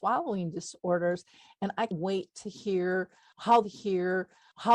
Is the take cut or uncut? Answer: cut